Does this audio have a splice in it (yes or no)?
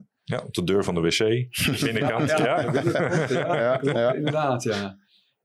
yes